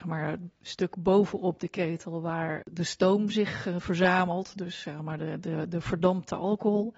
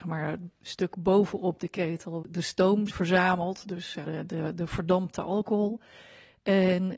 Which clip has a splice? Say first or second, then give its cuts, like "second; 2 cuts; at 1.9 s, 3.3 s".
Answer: second; 3 cuts; at 2.2 s, 2.9 s, 4.0 s